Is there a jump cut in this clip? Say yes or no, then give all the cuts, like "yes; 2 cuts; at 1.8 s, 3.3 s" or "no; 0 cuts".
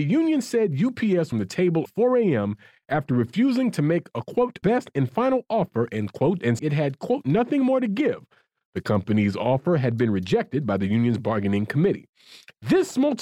yes; 4 cuts; at 1.3 s, 1.9 s, 4.6 s, 6.6 s